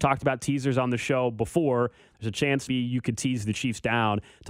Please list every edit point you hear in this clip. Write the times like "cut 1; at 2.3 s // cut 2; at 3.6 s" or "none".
cut 1; at 2.7 s